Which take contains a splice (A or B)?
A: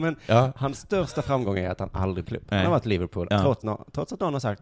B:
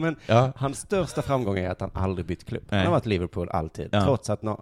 A